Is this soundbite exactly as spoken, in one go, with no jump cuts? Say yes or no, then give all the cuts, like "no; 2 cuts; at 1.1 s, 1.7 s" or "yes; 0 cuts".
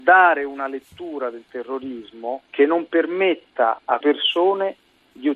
no; 2 cuts; at 2.5 s, 4.0 s